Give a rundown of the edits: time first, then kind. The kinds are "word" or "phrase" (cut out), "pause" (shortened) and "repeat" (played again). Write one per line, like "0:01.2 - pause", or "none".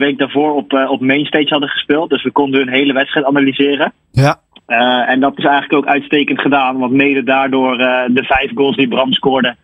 none